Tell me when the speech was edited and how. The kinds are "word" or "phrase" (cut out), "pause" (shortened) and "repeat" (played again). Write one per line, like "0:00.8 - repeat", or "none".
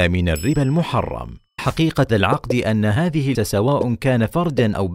0:01.6 - word
0:02.1 - word
0:03.3 - word